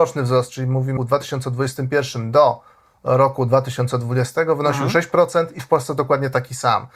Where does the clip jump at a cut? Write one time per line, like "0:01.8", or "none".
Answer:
0:01.0